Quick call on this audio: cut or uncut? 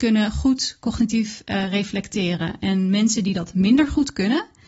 uncut